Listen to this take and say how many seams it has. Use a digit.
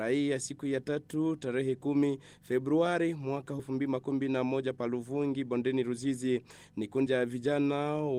2